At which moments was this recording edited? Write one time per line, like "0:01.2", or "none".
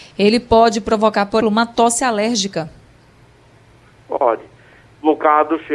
0:01.4